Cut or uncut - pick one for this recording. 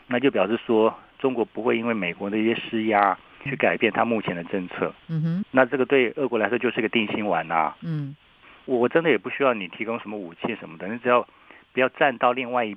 cut